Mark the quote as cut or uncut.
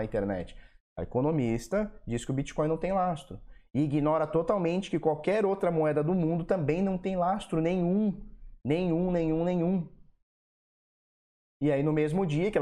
uncut